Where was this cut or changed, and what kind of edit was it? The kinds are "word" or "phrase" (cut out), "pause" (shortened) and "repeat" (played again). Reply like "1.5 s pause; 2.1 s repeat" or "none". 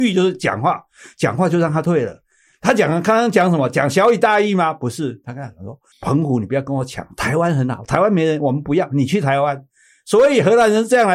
5.9 s pause